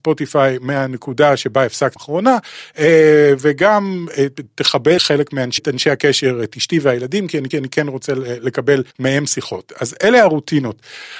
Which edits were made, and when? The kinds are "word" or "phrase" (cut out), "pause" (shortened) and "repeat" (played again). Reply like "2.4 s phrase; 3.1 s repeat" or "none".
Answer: 2.0 s word; 5.0 s word; 5.6 s phrase; 7.5 s repeat; 8.9 s pause